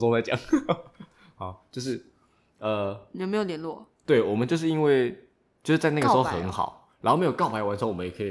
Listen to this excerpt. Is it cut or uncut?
uncut